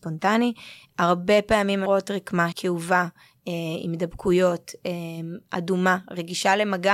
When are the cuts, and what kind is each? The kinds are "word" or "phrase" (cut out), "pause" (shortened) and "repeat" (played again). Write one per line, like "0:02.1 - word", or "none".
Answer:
0:01.9 - word
0:02.5 - word